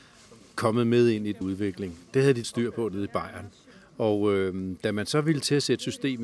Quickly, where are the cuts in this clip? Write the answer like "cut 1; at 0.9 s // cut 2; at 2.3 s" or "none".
cut 1; at 1.4 s // cut 2; at 2.4 s // cut 3; at 3.7 s